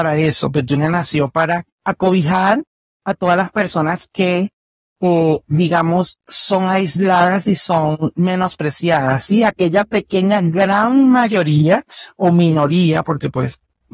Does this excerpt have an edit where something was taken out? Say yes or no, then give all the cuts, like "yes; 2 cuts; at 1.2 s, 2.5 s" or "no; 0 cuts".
yes; 1 cut; at 1.7 s